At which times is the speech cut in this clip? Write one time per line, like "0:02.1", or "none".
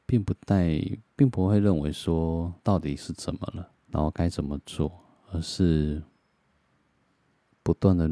0:02.6
0:03.8